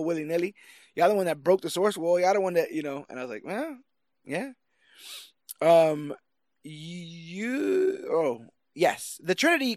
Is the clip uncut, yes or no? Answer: yes